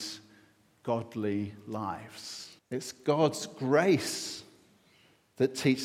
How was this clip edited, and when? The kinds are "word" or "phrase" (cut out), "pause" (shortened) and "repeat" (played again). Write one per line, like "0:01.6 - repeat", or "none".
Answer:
0:02.6 - pause